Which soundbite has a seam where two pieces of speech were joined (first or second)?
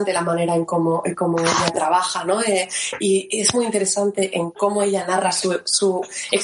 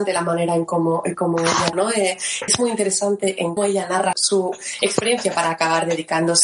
second